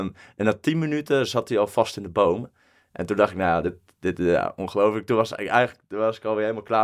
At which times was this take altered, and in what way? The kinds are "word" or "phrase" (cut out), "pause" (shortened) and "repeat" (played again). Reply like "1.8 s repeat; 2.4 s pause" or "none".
none